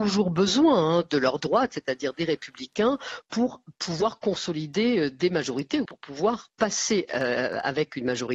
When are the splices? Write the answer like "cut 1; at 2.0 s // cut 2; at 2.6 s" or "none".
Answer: cut 1; at 5.9 s